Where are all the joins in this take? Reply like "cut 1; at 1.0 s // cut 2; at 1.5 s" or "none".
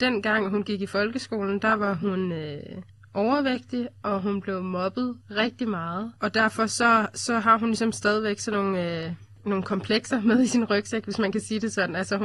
cut 1; at 2.9 s // cut 2; at 5.2 s // cut 3; at 6.2 s